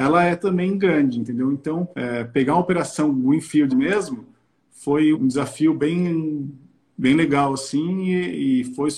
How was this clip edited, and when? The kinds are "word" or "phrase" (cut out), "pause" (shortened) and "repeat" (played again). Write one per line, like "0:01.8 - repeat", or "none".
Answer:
0:01.9 - pause
0:03.7 - phrase
0:05.1 - word